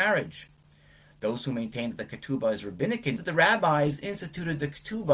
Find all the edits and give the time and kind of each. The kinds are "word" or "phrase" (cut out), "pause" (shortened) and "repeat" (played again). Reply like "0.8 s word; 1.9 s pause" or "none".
3.2 s phrase